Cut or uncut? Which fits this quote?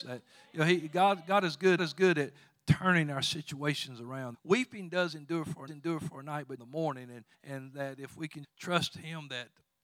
cut